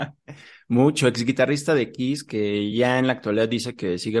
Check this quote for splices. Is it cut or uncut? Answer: uncut